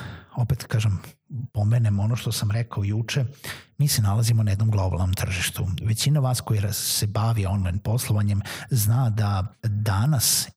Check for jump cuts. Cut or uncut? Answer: cut